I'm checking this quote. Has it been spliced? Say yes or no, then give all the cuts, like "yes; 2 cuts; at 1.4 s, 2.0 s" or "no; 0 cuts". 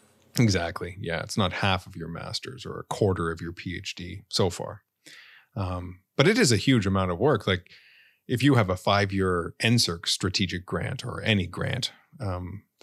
no; 0 cuts